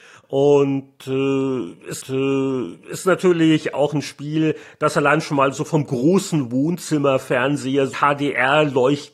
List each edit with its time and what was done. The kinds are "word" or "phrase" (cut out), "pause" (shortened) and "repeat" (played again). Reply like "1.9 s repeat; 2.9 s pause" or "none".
2.0 s repeat; 7.9 s word